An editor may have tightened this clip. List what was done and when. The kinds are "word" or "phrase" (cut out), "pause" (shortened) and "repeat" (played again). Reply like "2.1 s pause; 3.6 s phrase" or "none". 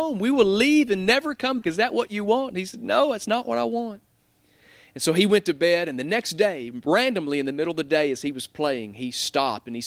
1.6 s word